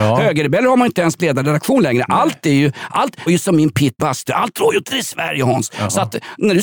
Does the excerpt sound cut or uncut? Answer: cut